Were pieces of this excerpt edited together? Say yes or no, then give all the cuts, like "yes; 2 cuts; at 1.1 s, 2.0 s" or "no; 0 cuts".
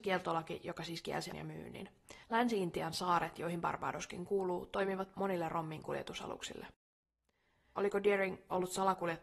yes; 3 cuts; at 1.3 s, 2.2 s, 5.1 s